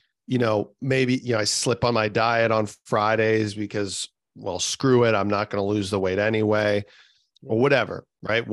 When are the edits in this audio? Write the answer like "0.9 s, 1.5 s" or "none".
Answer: none